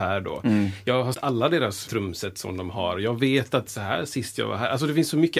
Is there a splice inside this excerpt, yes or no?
yes